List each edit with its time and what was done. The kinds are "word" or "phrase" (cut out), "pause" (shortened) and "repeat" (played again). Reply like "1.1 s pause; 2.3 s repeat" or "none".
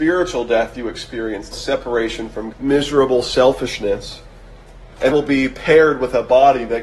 1.5 s word; 2.5 s word; 5.1 s word